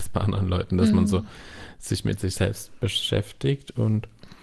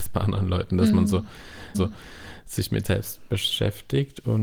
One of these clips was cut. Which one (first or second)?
second